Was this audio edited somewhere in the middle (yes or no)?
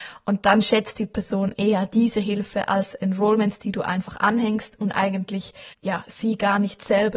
yes